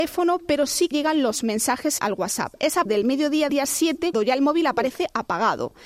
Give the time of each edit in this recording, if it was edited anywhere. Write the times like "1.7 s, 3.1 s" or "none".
0.9 s, 2.0 s, 2.9 s, 3.5 s, 4.1 s